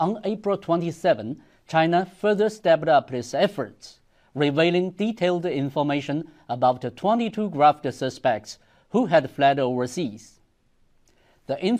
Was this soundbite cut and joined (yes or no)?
no